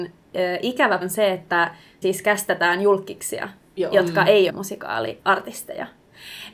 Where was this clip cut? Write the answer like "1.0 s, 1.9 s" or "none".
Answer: 1.0 s, 2.0 s, 4.5 s